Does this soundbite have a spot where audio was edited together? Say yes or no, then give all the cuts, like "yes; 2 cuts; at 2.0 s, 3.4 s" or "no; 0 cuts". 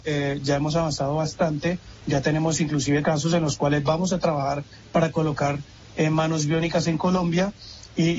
yes; 1 cut; at 3.0 s